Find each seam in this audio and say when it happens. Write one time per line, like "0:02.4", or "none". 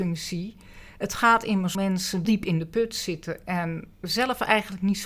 0:01.7
0:02.2
0:03.9